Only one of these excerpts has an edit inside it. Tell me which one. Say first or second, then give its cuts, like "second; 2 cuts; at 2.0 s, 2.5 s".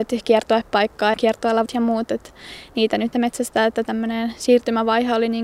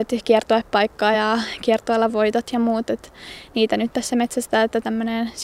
first; 3 cuts; at 1.1 s, 1.7 s, 3.1 s